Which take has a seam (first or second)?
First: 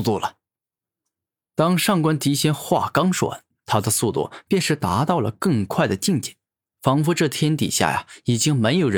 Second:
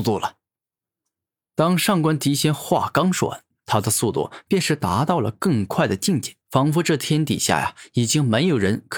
second